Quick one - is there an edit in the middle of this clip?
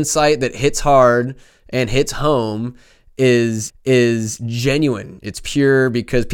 yes; 1 cut; at 3.7 s

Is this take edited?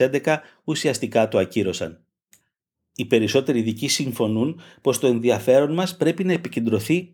no; 0 cuts

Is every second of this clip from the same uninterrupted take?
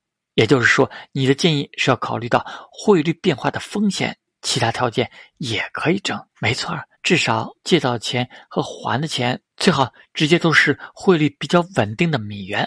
no; 4 cuts; at 6.3 s, 6.9 s, 7.6 s, 9.5 s

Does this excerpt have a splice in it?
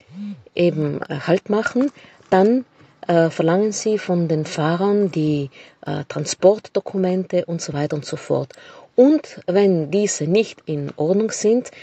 no; 0 cuts

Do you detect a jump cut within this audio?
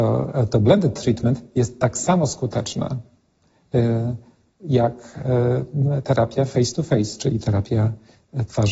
no; 0 cuts

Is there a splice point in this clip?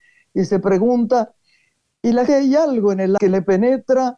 yes; 2 cuts; at 2.3 s, 3.2 s

